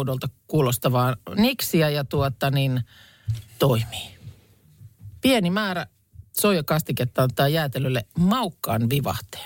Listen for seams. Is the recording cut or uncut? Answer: cut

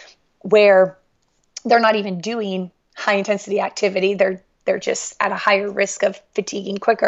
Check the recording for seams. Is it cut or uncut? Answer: uncut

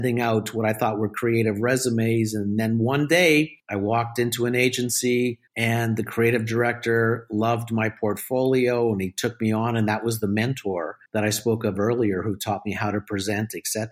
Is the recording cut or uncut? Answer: cut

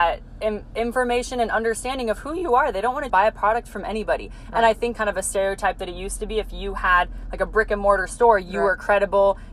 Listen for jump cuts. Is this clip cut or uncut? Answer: cut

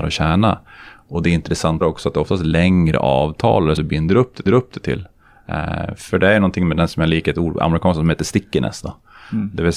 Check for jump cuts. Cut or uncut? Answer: cut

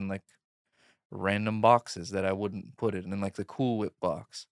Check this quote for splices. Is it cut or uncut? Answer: uncut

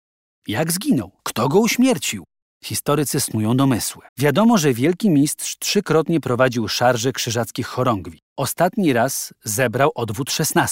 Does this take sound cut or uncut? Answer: cut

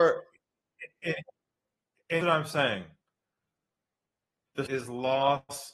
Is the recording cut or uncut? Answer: cut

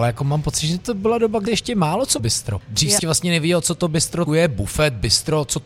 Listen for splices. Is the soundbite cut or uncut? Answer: cut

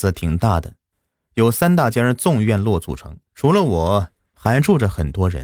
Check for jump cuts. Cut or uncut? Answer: cut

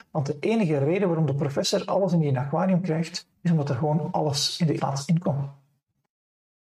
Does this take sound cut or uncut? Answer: cut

